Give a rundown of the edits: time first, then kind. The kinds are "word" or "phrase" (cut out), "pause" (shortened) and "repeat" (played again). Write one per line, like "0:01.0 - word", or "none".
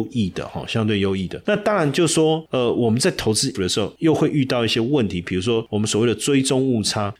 0:03.5 - word